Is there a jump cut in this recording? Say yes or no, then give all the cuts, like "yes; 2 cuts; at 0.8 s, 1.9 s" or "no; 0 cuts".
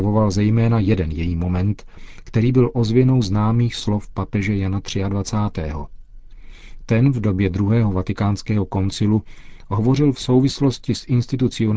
no; 0 cuts